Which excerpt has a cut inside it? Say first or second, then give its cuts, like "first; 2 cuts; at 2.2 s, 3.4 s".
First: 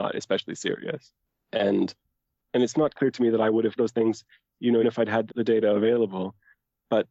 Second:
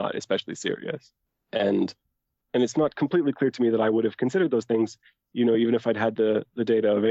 first; 4 cuts; at 2.9 s, 3.8 s, 4.8 s, 5.3 s